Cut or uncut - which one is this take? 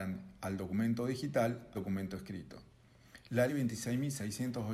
cut